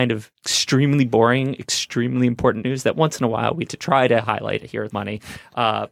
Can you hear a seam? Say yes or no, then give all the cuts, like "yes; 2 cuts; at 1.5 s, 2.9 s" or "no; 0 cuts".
yes; 3 cuts; at 2.6 s, 3.7 s, 4.9 s